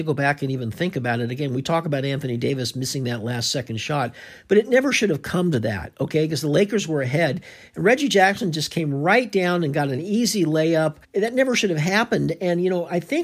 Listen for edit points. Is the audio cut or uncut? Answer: cut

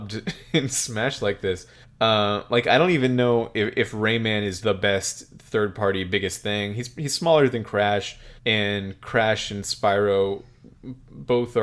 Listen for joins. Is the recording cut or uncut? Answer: cut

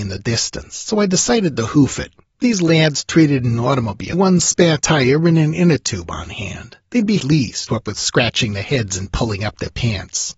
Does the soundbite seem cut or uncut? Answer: cut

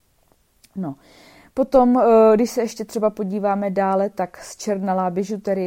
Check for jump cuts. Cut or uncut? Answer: uncut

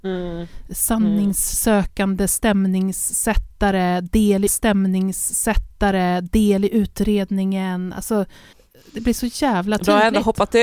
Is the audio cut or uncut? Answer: cut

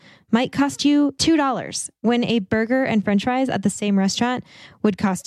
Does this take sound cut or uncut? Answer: uncut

